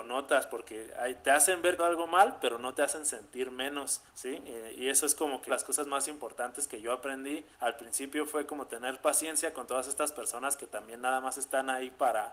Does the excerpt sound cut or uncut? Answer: cut